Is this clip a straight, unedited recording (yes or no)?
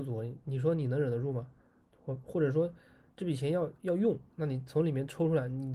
yes